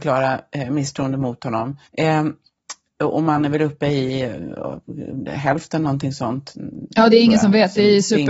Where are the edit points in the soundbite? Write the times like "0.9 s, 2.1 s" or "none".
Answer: 1.9 s